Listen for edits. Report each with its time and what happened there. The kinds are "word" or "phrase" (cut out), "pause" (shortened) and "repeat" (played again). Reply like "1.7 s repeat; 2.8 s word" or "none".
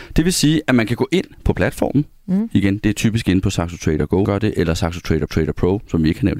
4.2 s word; 5.3 s repeat